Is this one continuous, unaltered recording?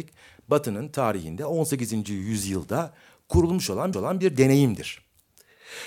no; 1 cut; at 3.9 s

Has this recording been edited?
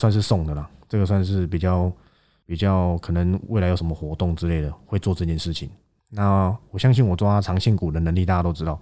no; 0 cuts

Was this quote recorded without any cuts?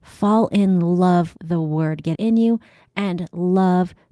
no; 2 cuts; at 1.4 s, 2.1 s

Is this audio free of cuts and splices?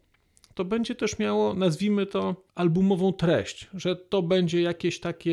no; 1 cut; at 2.5 s

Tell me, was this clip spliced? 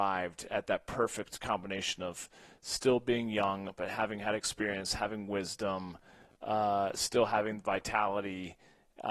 no; 0 cuts

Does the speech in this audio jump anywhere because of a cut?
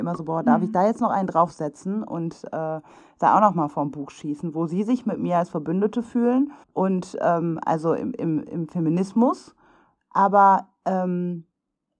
yes; 1 cut; at 6.6 s

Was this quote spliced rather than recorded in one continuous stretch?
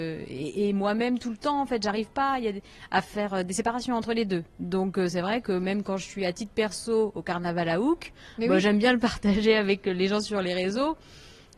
no; 0 cuts

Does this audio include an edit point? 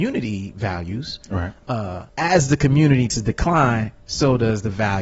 yes; 2 cuts; at 2.1 s, 3.1 s

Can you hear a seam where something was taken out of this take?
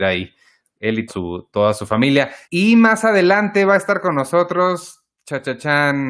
yes; 2 cuts; at 1.1 s, 2.4 s

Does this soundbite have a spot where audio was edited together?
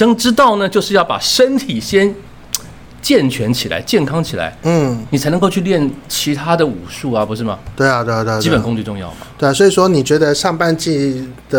no; 0 cuts

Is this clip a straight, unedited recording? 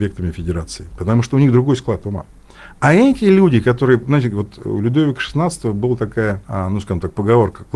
no; 1 cut; at 6.4 s

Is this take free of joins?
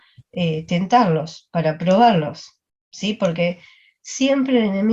yes; 0 cuts

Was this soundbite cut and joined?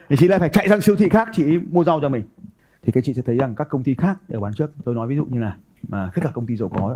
no; 0 cuts

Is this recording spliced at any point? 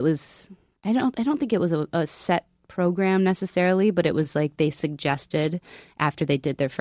no; 0 cuts

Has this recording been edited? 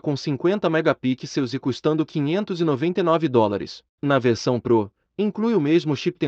yes; 1 cut; at 3.9 s

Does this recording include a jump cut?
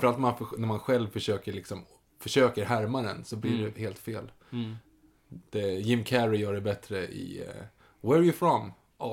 no; 0 cuts

